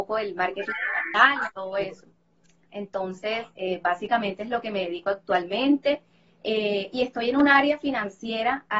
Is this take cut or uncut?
uncut